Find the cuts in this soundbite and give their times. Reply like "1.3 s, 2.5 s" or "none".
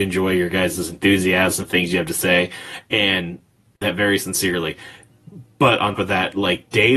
1.6 s, 3.8 s, 6.0 s